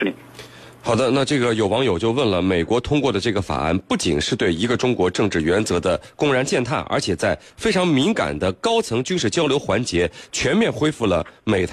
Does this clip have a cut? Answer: no; 0 cuts

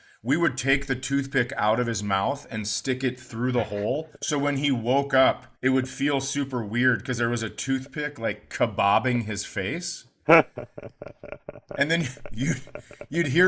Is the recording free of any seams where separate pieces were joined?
no; 2 cuts; at 4.2 s, 5.6 s

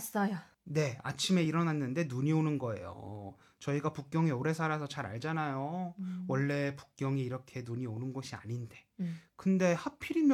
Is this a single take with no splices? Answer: yes; 0 cuts

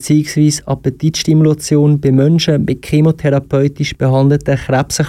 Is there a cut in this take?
no; 0 cuts

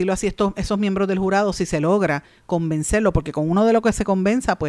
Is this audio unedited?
yes; 0 cuts

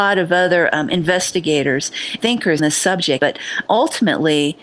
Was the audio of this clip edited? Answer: yes; 4 cuts; at 2.2 s, 2.6 s, 3.2 s, 3.7 s

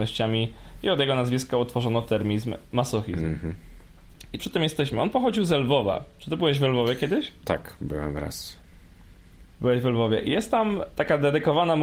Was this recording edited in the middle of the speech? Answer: yes; 2 cuts; at 4.4 s, 9.5 s

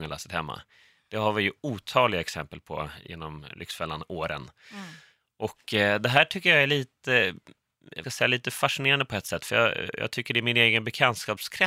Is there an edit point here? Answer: yes; 1 cut; at 8.0 s

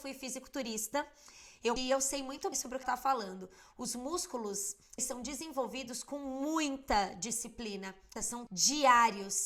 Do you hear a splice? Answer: yes; 6 cuts; at 1.8 s, 2.5 s, 2.8 s, 5.0 s, 8.2 s, 8.5 s

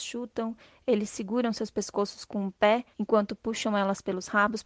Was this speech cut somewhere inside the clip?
yes; 1 cut; at 2.9 s

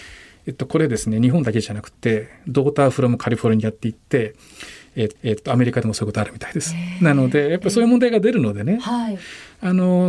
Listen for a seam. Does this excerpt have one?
yes; 1 cut; at 5.2 s

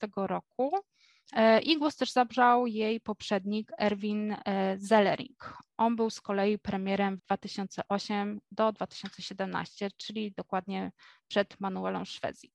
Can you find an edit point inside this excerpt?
yes; 1 cut; at 7.2 s

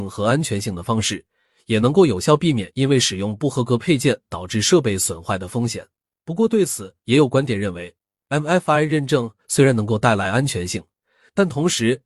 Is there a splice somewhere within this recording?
no; 0 cuts

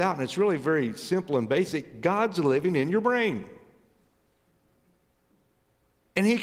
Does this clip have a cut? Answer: no; 0 cuts

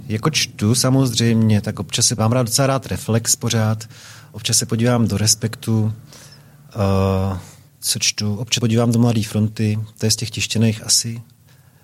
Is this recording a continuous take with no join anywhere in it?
no; 3 cuts; at 2.2 s, 7.7 s, 8.6 s

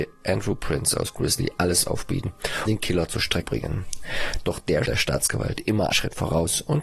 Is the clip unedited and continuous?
no; 4 cuts; at 2.6 s, 3.4 s, 4.8 s, 5.9 s

